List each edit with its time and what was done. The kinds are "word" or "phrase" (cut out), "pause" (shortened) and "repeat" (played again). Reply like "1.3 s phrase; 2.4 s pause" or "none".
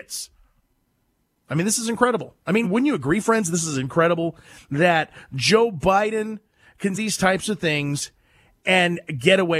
2.6 s word; 6.9 s word